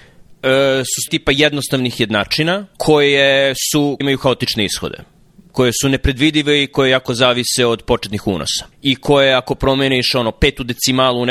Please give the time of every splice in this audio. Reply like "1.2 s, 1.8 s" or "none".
1.1 s, 2.7 s, 4.0 s, 8.7 s

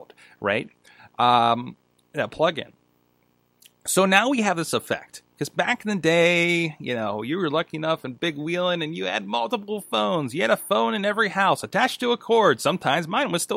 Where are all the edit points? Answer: none

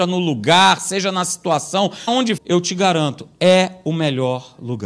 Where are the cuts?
2.1 s, 2.4 s

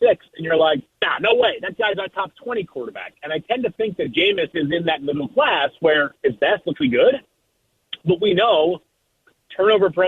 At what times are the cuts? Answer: 0.9 s, 2.1 s, 6.2 s, 6.8 s

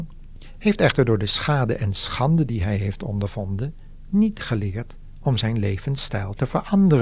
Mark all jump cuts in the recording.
none

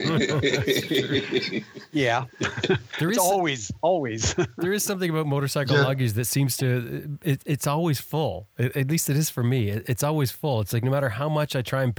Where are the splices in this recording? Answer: none

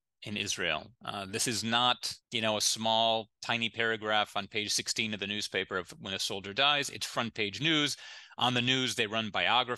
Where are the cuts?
1.0 s, 2.2 s

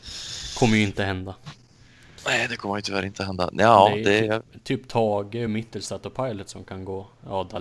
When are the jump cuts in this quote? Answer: none

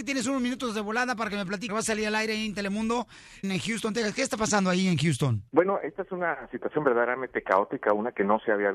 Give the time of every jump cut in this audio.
1.7 s, 3.4 s, 5.5 s

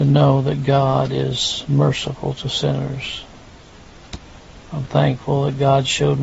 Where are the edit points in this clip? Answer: 4.8 s

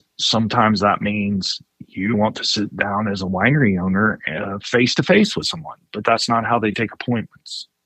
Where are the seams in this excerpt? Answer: 2.1 s

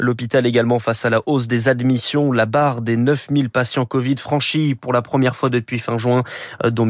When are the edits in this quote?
none

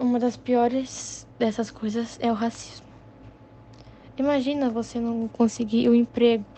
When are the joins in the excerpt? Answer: none

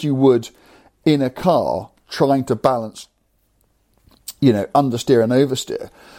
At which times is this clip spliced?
2.0 s

